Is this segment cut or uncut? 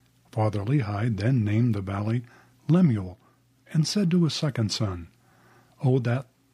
uncut